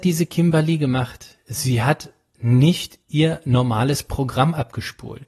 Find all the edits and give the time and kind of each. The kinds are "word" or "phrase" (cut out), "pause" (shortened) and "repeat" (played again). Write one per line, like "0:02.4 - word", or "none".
0:03.0 - pause